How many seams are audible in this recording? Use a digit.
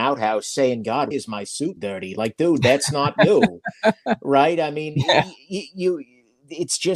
2